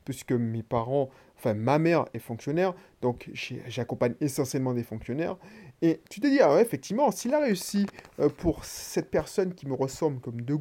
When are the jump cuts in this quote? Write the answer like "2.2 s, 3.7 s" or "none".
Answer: 6.0 s